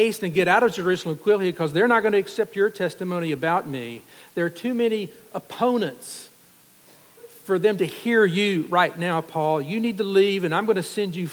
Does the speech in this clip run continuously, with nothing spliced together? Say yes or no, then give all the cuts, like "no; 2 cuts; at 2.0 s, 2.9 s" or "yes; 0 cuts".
yes; 0 cuts